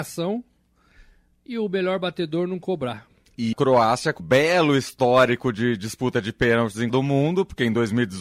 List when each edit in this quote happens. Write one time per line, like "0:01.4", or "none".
0:03.5
0:04.2
0:06.9